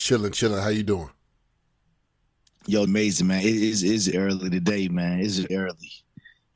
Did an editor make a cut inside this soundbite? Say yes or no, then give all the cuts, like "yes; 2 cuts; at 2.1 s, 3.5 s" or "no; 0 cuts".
yes; 3 cuts; at 2.9 s, 4.1 s, 5.5 s